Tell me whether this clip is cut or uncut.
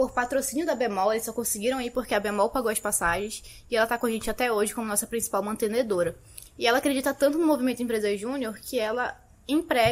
uncut